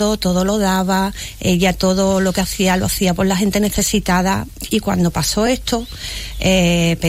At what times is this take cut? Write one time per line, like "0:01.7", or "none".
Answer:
none